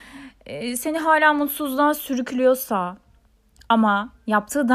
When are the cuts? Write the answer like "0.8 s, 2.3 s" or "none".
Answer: none